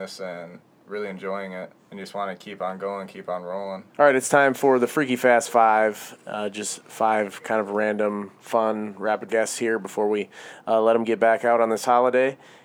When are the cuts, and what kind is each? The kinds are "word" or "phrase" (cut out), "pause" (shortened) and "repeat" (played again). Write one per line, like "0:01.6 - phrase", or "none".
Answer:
0:01.8 - pause
0:03.9 - pause
0:09.3 - phrase

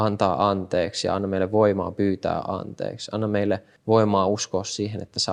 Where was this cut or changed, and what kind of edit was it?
0:03.8 - pause

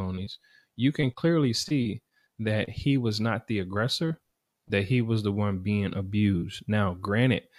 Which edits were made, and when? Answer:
none

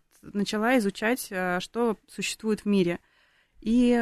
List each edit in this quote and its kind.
none

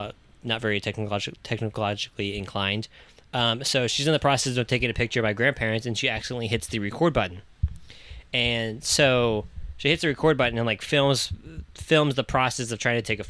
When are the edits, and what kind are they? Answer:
none

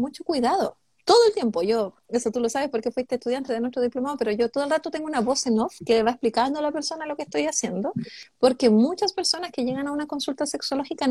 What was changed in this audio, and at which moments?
none

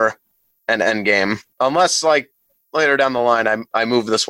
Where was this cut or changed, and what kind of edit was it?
0:01.5 - pause

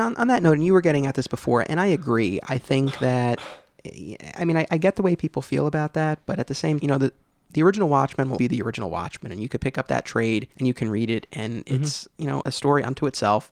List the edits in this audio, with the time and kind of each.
0:06.8 - word
0:08.4 - word
0:10.5 - pause
0:12.4 - word

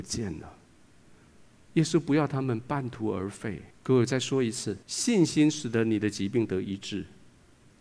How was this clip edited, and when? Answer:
0:03.7 - pause
0:04.8 - pause

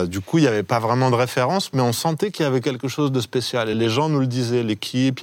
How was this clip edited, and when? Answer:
none

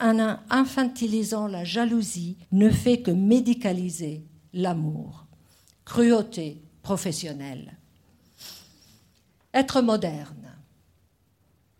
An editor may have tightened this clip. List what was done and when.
0:02.4 - pause

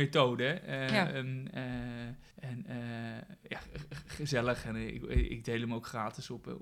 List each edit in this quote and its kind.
0:02.3 - pause

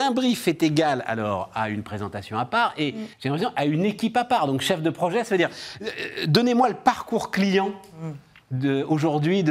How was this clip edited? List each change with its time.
0:03.1 - pause

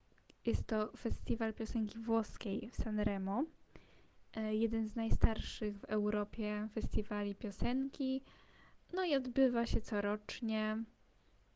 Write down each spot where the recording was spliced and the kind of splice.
0:08.8 - pause

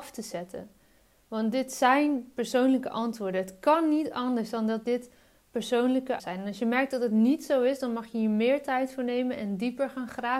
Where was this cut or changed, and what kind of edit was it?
0:06.2 - phrase

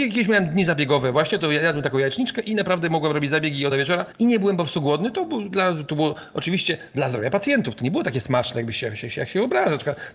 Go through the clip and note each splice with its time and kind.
0:03.7 - word

